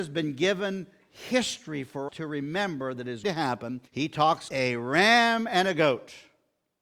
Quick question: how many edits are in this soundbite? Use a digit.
4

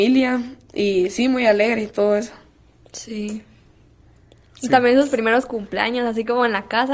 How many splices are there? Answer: 0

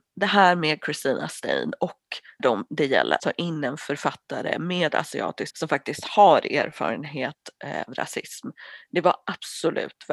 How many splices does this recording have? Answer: 4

